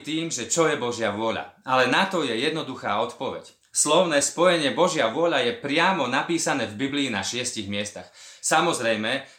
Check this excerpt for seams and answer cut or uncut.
uncut